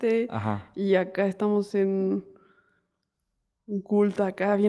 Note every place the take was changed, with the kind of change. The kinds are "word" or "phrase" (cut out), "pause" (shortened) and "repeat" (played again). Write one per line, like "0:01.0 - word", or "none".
none